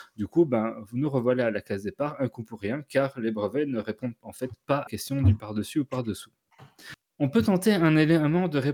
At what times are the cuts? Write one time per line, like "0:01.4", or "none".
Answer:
0:04.9
0:07.1